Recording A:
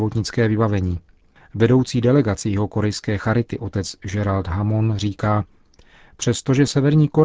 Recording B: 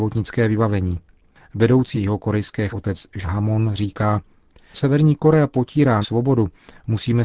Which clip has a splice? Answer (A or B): B